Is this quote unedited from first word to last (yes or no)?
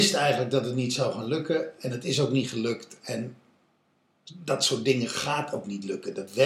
yes